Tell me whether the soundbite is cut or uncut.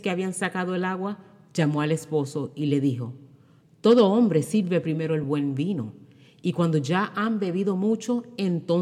uncut